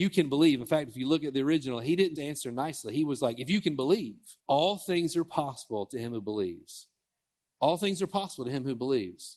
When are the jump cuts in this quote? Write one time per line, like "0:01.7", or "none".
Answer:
0:02.2
0:04.4
0:07.0